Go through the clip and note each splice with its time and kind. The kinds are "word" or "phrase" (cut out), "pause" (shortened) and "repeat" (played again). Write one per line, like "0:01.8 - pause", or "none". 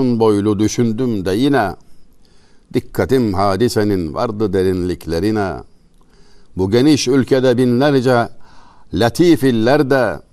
none